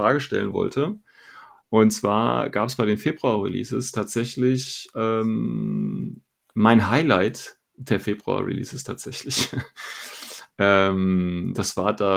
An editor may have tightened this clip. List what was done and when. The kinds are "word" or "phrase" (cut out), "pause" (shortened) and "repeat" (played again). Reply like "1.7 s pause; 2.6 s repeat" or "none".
none